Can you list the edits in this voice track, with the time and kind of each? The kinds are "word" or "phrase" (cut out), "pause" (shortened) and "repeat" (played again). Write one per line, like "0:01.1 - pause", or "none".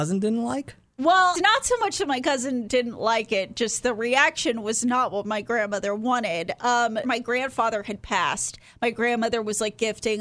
0:01.3 - word
0:07.0 - phrase